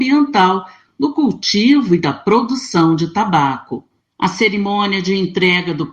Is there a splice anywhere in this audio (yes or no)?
no